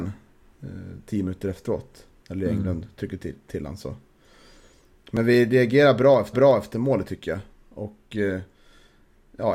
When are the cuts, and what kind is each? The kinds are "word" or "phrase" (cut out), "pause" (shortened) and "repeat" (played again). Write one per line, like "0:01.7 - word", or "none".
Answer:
0:06.3 - repeat